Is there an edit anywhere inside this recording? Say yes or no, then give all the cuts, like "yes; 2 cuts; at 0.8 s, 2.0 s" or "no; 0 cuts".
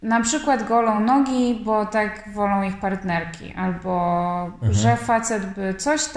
no; 0 cuts